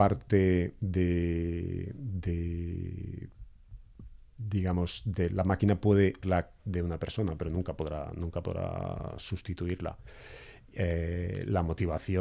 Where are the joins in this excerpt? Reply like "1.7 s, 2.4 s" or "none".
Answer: 6.2 s, 6.6 s